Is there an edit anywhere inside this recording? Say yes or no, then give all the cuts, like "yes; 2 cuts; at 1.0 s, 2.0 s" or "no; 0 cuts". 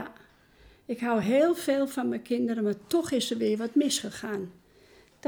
no; 0 cuts